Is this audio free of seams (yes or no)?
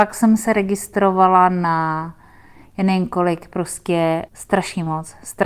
no